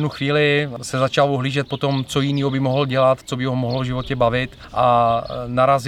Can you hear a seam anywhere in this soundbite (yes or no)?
no